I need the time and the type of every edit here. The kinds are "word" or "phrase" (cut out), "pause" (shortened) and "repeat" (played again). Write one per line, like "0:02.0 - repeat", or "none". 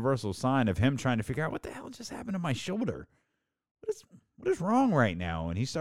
none